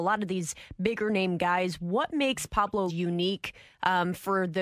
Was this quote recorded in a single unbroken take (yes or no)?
no